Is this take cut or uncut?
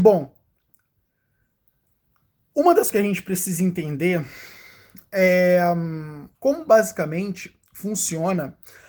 cut